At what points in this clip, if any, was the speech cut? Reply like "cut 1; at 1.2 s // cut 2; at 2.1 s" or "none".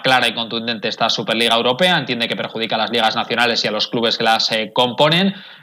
none